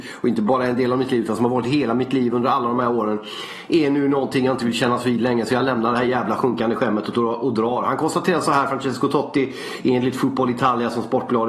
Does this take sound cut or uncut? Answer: uncut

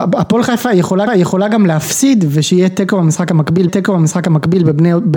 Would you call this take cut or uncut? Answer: cut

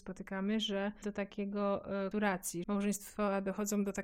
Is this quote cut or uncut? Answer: cut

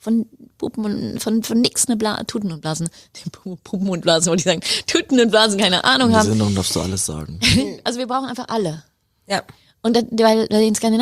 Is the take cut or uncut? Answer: uncut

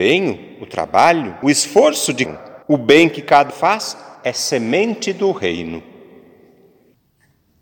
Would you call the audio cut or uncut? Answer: cut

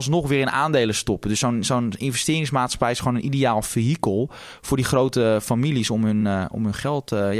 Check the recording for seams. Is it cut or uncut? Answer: uncut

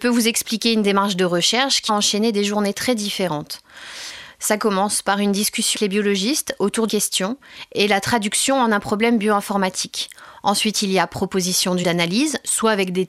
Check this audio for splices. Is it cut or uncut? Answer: cut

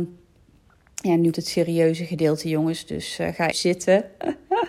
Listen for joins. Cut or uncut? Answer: cut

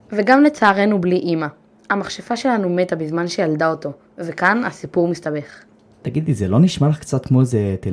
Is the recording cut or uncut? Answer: uncut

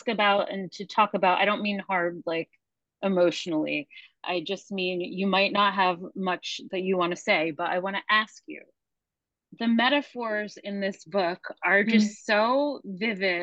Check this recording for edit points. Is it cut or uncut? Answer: uncut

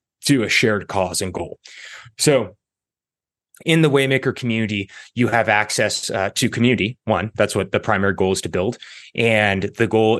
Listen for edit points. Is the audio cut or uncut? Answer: uncut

